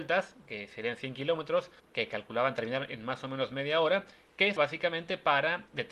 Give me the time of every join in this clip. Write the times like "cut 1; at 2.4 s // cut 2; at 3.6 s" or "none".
cut 1; at 1.8 s // cut 2; at 4.6 s